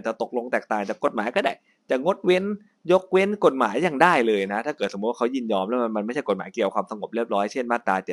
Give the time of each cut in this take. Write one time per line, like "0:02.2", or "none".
none